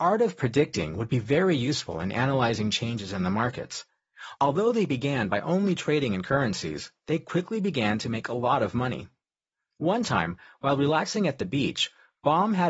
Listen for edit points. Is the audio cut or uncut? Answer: uncut